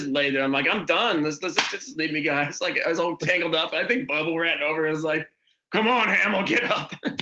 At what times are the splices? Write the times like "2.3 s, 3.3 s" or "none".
none